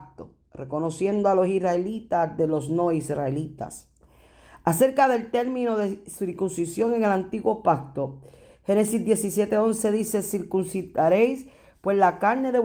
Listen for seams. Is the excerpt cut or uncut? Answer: uncut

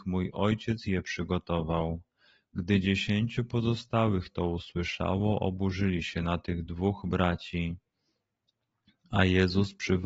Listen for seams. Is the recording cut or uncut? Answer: uncut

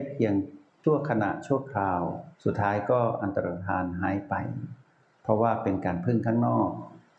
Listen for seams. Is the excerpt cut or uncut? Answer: cut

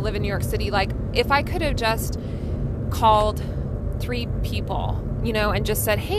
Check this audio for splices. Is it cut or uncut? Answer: uncut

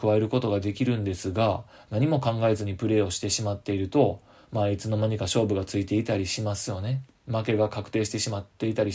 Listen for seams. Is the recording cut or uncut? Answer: uncut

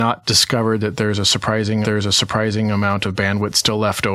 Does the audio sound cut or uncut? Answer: cut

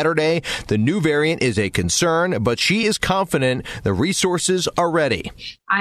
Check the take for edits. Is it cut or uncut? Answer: uncut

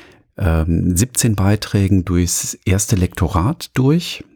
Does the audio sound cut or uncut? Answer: uncut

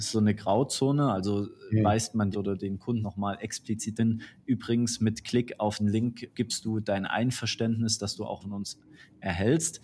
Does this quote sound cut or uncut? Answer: cut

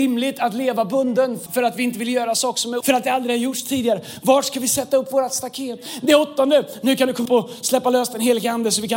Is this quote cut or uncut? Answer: cut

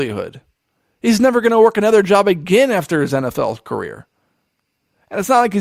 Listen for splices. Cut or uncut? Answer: uncut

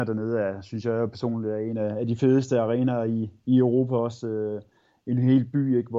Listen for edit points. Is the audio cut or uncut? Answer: uncut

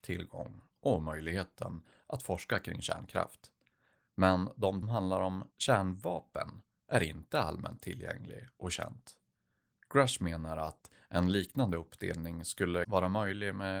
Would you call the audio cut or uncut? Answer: cut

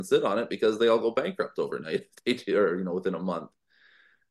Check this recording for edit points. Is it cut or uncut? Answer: uncut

